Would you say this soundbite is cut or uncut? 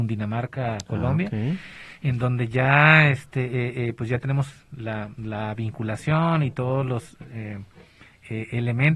uncut